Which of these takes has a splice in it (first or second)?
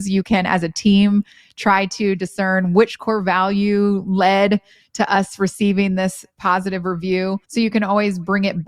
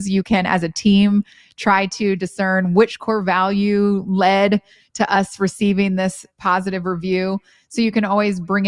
first